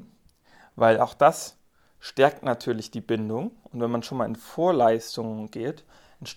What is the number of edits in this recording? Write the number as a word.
zero